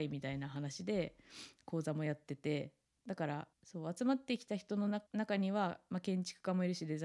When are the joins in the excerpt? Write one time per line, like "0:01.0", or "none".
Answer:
0:03.5
0:05.1